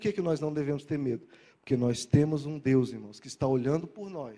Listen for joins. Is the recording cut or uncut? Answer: uncut